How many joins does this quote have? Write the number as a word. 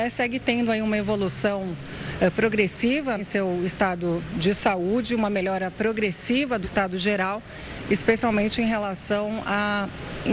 two